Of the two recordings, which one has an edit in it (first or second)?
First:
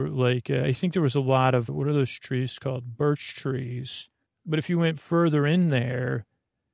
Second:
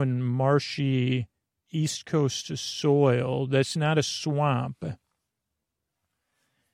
first